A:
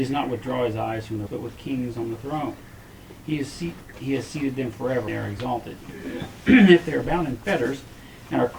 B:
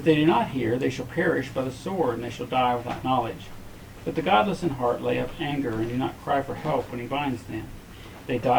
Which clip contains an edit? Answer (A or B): A